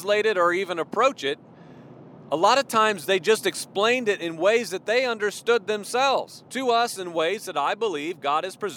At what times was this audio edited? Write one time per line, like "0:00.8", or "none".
0:06.5